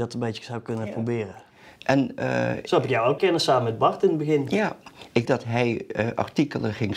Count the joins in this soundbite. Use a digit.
2